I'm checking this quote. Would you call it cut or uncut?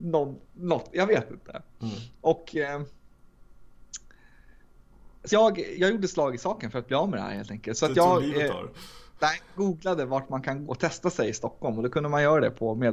cut